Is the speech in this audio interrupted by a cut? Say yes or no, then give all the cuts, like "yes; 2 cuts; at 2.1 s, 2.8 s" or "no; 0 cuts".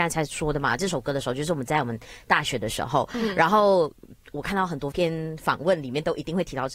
yes; 1 cut; at 4.2 s